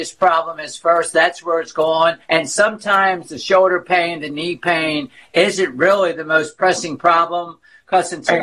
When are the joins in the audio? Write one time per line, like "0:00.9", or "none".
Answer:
0:02.2